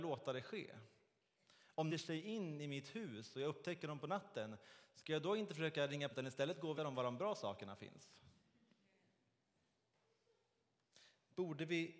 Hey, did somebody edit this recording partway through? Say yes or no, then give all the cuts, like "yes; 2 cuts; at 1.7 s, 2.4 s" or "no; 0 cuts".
yes; 3 cuts; at 1.9 s, 6.1 s, 6.8 s